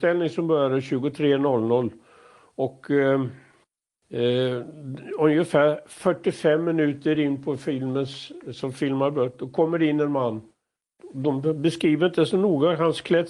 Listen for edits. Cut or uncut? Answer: uncut